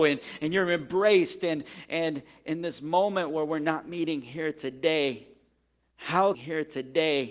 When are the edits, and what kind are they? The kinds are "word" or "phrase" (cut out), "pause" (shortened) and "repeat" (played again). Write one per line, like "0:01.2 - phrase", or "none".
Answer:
0:06.3 - repeat